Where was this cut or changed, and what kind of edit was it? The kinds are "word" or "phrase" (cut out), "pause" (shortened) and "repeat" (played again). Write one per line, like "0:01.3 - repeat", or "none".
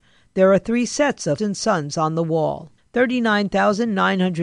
0:01.4 - word
0:02.8 - pause